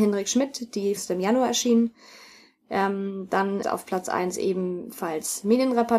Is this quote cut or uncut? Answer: cut